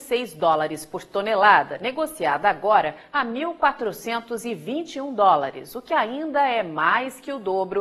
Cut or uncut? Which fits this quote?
uncut